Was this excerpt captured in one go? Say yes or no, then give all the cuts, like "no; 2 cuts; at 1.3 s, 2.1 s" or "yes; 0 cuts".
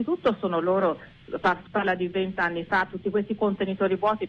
yes; 0 cuts